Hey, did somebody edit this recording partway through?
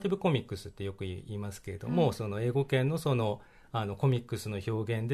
no; 0 cuts

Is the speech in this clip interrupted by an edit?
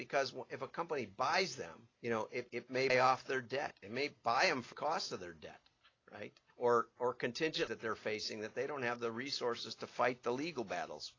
yes; 6 cuts; at 1.9 s, 2.5 s, 2.9 s, 4.7 s, 6.5 s, 7.7 s

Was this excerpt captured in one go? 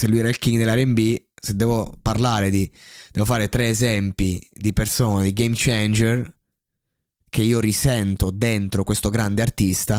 yes; 0 cuts

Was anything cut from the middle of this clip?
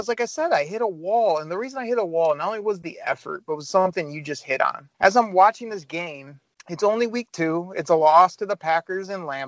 yes; 2 cuts; at 4.9 s, 6.5 s

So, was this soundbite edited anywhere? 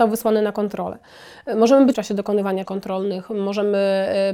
yes; 2 cuts; at 1.9 s, 2.6 s

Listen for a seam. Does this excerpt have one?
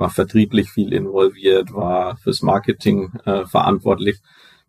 no; 0 cuts

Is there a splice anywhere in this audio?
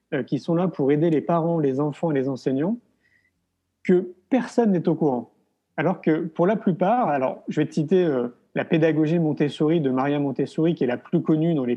no; 0 cuts

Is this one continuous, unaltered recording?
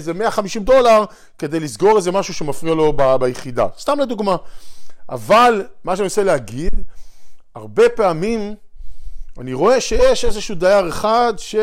yes; 0 cuts

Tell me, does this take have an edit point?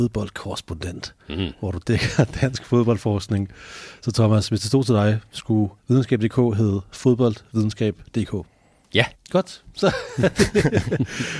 yes; 2 cuts; at 5.8 s, 9.1 s

